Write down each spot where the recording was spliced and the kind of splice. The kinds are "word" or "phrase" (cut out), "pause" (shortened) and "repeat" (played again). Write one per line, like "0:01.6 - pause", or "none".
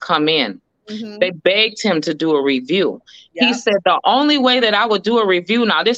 none